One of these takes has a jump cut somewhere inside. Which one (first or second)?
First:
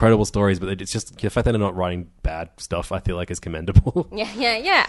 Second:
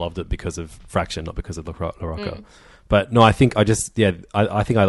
first